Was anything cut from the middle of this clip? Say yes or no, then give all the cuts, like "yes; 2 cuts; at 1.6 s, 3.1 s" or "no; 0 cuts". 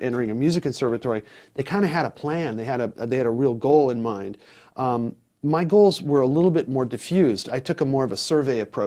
no; 0 cuts